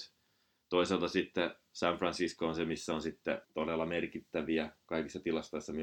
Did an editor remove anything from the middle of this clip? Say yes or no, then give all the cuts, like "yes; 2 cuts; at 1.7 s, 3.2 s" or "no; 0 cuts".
yes; 1 cut; at 3.4 s